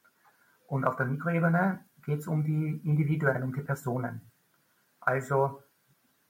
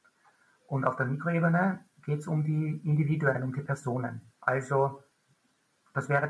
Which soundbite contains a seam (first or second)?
second